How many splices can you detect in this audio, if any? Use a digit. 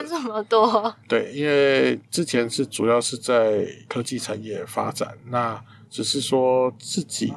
0